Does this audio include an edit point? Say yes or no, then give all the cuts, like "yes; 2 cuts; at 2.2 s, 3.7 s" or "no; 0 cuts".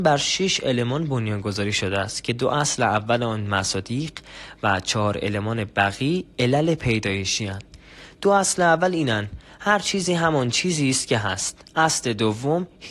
no; 0 cuts